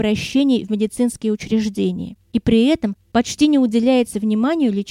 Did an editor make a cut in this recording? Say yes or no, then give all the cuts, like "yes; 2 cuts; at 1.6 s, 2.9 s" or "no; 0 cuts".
no; 0 cuts